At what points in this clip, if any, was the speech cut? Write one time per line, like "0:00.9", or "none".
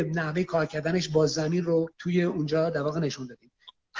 0:01.9